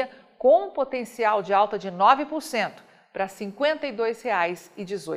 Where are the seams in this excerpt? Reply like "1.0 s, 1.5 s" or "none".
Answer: none